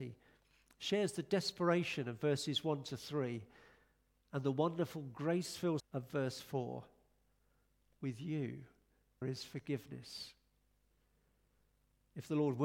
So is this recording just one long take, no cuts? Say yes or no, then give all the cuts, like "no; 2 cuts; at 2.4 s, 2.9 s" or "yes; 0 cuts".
no; 2 cuts; at 5.8 s, 9.2 s